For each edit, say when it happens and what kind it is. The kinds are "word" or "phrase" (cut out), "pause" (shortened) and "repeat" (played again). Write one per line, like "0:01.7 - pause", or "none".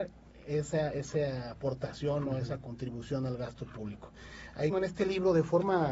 0:04.7 - word